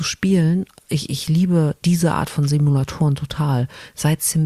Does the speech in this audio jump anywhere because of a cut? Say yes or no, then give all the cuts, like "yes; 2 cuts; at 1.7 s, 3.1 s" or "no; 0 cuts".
no; 0 cuts